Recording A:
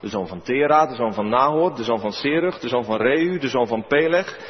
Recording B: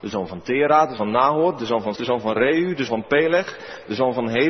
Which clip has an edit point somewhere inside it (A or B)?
B